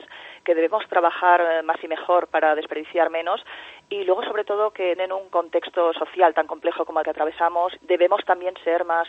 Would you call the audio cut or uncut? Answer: cut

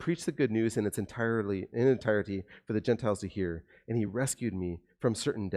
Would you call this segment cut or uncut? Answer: uncut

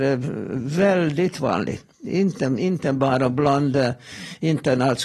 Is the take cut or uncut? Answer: cut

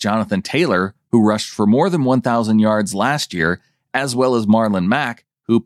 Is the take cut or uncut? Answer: uncut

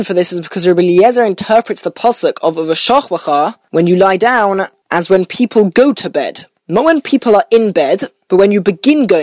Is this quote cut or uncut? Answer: uncut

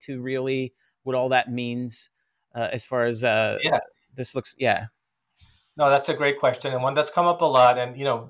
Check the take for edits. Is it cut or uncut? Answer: uncut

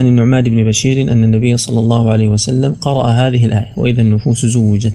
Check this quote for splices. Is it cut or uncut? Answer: uncut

